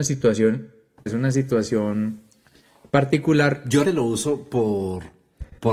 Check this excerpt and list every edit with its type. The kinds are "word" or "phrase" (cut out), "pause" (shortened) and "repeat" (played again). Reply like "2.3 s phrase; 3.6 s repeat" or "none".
1.1 s phrase; 3.8 s word